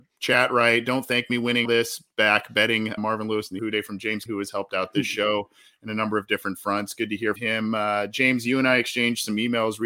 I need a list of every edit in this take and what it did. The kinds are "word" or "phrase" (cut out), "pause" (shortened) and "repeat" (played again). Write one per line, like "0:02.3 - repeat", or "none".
0:01.6 - word
0:03.0 - word
0:03.6 - word
0:04.3 - word
0:07.4 - word